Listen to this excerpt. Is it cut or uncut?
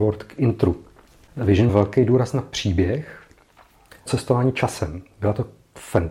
cut